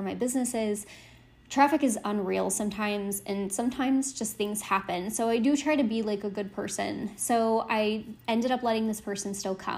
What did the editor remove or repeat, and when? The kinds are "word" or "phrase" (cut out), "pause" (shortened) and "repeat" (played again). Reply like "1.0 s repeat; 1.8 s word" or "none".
8.2 s pause